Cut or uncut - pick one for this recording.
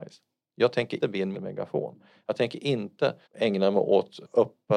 cut